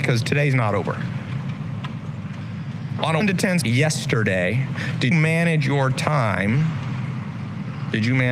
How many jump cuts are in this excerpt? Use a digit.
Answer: 3